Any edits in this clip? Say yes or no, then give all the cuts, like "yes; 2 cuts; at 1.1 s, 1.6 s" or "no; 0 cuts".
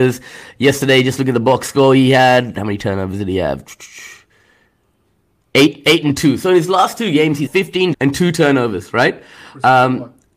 yes; 2 cuts; at 7.5 s, 7.9 s